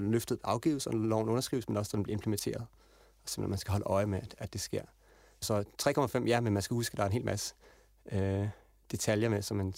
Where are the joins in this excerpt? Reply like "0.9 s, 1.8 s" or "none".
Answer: none